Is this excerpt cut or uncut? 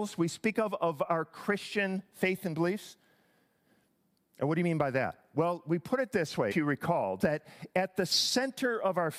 cut